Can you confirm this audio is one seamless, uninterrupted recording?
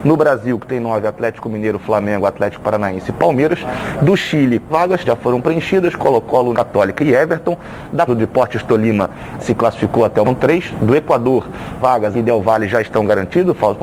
no; 8 cuts; at 4.7 s, 5.0 s, 6.5 s, 8.1 s, 9.4 s, 10.2 s, 11.8 s, 12.1 s

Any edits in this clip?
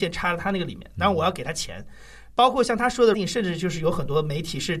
yes; 1 cut; at 3.1 s

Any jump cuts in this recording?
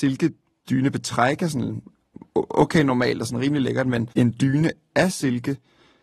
yes; 1 cut; at 4.1 s

